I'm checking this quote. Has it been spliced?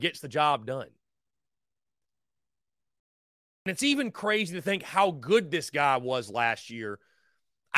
no; 0 cuts

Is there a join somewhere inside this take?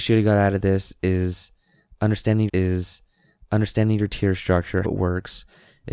yes; 2 cuts; at 2.5 s, 4.8 s

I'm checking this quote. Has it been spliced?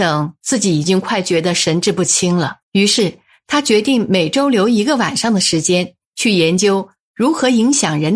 yes; 1 cut; at 2.6 s

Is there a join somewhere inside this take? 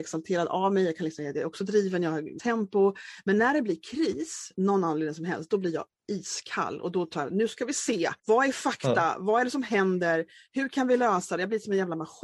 yes; 3 cuts; at 2.4 s, 4.5 s, 8.2 s

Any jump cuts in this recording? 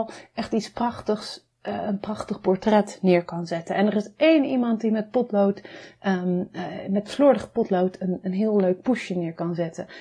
no; 0 cuts

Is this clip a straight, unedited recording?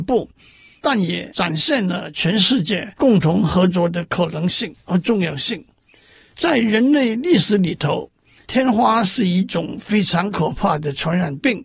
yes; 0 cuts

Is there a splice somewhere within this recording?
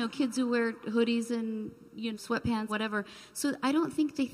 yes; 2 cuts; at 2.1 s, 2.7 s

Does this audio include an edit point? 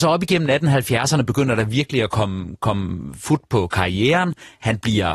no; 0 cuts

